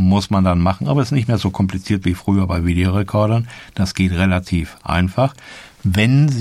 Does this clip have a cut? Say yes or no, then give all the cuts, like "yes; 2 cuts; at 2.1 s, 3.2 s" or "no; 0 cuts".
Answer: no; 0 cuts